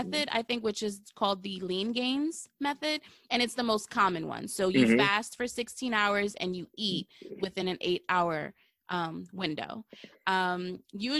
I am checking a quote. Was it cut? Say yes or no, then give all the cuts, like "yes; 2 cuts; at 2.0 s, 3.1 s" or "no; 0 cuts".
no; 0 cuts